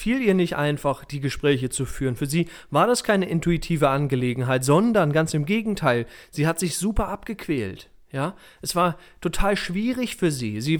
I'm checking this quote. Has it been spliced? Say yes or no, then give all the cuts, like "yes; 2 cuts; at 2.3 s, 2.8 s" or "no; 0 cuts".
no; 0 cuts